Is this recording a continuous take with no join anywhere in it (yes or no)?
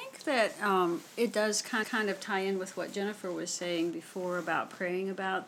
no